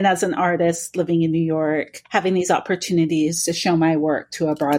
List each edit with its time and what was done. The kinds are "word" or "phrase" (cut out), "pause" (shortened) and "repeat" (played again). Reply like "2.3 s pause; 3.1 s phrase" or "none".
none